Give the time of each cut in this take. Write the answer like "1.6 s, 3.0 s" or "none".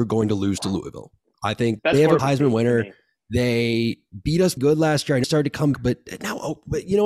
1.8 s, 2.2 s, 4.6 s, 5.2 s, 5.7 s

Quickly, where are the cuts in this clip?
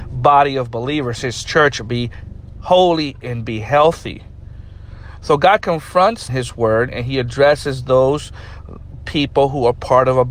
6.3 s, 6.9 s

